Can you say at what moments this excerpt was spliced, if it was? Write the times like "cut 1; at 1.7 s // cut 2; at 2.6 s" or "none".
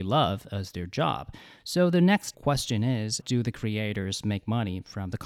cut 1; at 2.3 s // cut 2; at 3.2 s